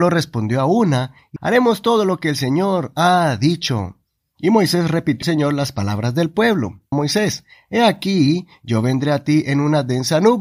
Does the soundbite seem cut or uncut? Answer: cut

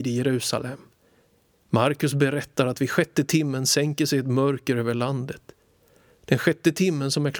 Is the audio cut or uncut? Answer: uncut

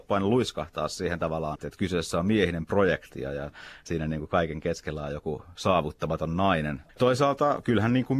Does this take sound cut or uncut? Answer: cut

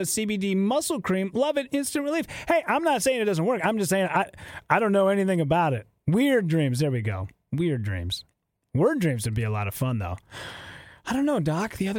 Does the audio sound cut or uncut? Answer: uncut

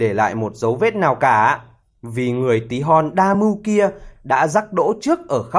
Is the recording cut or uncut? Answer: uncut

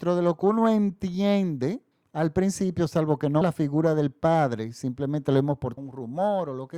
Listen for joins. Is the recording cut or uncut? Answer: cut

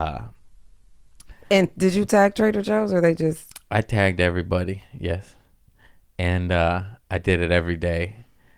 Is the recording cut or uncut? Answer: uncut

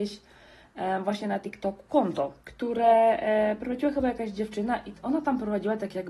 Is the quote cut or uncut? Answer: cut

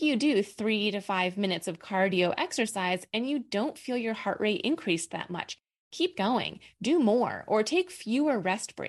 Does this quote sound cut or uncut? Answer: uncut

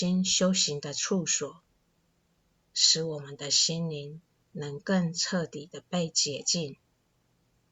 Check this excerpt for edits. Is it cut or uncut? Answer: uncut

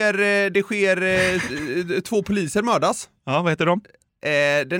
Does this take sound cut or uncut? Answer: uncut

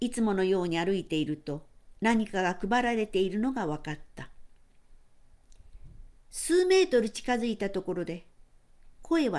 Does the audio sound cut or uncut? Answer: cut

